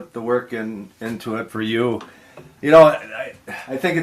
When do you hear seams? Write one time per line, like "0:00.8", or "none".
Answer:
0:01.5
0:02.6